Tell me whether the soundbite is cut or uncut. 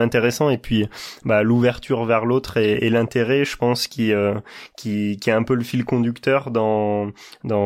uncut